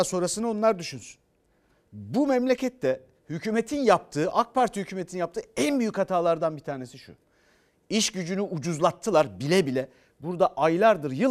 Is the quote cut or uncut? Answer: uncut